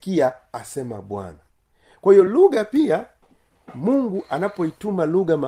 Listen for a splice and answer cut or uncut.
uncut